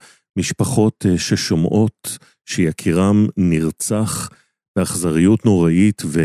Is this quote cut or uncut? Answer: uncut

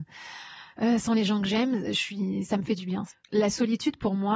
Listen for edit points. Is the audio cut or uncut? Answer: cut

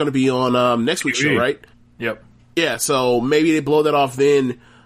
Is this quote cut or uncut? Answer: cut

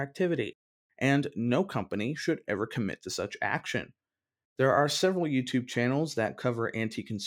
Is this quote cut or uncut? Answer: uncut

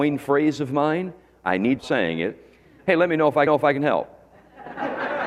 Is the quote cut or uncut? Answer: cut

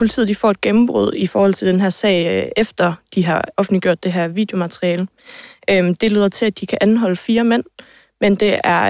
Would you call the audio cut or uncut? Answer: uncut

